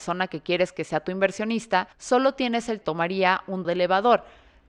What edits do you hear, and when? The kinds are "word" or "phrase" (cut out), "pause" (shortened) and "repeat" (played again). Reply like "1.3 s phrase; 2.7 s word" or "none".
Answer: 1.9 s pause; 2.8 s phrase; 3.6 s word